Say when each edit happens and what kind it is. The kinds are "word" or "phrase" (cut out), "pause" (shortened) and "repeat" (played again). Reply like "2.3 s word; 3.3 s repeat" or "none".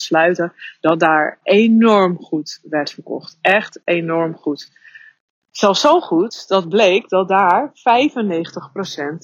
1.4 s word